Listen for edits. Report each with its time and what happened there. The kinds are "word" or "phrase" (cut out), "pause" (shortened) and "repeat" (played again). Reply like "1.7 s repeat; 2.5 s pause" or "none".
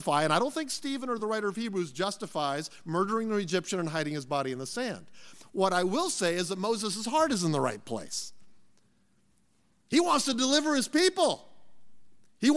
none